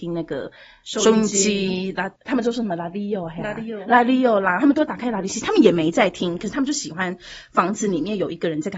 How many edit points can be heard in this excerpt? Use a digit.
1